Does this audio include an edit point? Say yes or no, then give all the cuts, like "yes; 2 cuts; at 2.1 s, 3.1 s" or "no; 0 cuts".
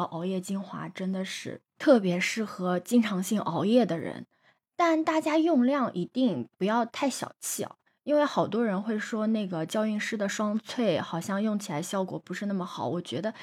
no; 0 cuts